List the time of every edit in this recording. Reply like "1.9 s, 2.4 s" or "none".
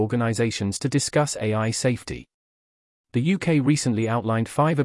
none

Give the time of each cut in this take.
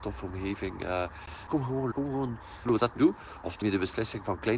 1.9 s, 2.7 s, 3.0 s, 3.6 s

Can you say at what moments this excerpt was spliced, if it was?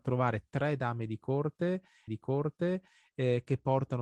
2.1 s

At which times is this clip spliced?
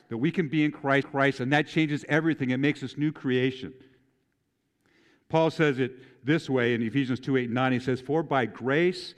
1.0 s

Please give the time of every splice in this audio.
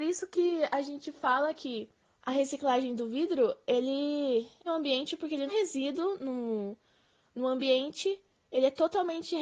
2.0 s, 4.7 s, 5.5 s

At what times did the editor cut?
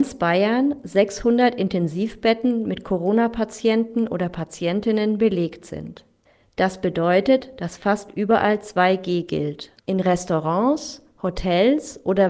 6.2 s, 9.8 s

